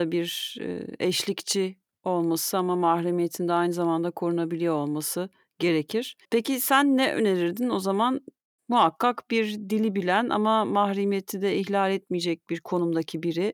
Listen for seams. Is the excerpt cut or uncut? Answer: cut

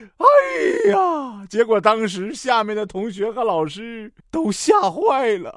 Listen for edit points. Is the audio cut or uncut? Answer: cut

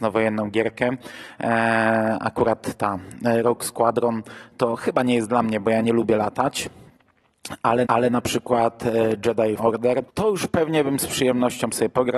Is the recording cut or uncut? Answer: cut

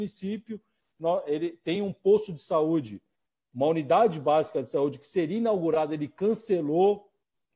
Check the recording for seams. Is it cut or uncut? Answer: uncut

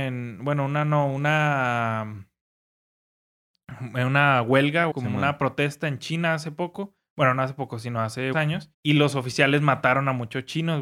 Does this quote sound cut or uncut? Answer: cut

